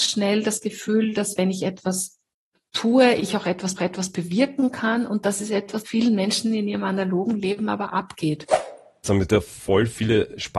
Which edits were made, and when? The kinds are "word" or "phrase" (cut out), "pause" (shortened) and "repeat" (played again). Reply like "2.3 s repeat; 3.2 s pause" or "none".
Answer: 3.8 s repeat; 5.8 s word